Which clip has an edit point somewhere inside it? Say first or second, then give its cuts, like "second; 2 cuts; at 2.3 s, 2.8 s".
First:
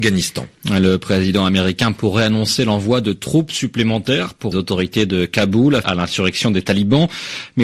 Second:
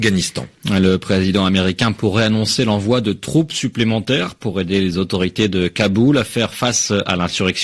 first; 2 cuts; at 4.5 s, 5.8 s